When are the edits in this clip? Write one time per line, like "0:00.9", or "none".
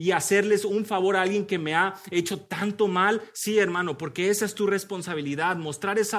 none